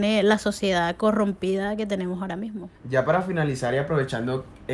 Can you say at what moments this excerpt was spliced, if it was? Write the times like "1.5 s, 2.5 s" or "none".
2.8 s